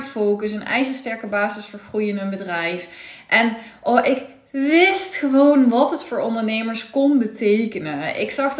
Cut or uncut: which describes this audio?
uncut